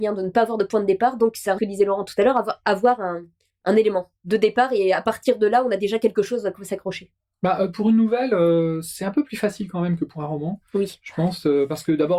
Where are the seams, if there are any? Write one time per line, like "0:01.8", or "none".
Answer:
0:01.6